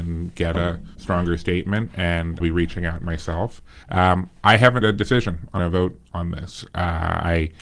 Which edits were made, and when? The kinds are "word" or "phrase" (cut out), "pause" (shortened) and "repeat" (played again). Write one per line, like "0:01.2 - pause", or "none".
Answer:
0:00.9 - pause
0:02.4 - word
0:03.8 - pause
0:04.8 - word
0:05.6 - phrase

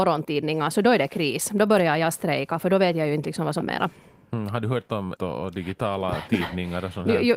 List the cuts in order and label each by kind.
0:03.6 - word
0:05.2 - word

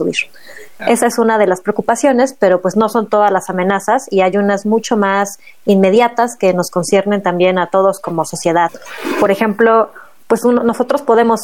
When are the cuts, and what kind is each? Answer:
none

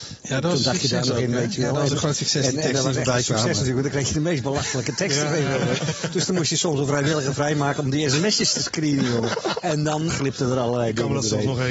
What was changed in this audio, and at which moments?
0:10.1 - word

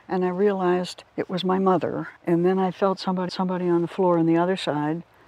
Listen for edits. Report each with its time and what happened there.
0:01.1 - pause
0:02.2 - pause
0:03.3 - repeat

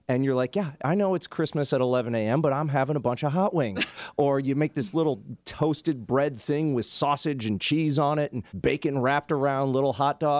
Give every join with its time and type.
0:05.4 - pause
0:08.5 - pause

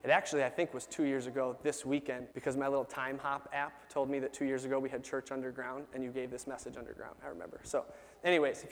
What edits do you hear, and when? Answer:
0:02.3 - pause

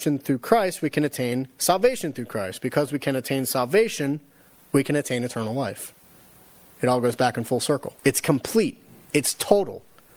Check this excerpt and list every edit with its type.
0:08.0 - pause

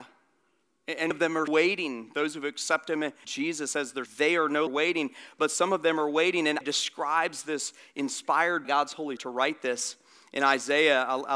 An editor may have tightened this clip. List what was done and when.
0:01.1 - word
0:01.5 - word
0:03.2 - word
0:04.1 - word
0:04.7 - word
0:06.6 - word
0:08.6 - word
0:09.2 - word

